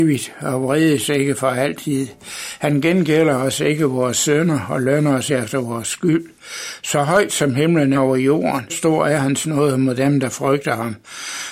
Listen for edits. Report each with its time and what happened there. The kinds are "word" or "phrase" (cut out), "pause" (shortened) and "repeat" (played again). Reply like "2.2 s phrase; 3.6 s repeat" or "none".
5.3 s word; 7.9 s word; 8.7 s word

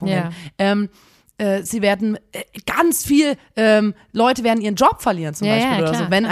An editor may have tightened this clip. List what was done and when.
1.7 s word

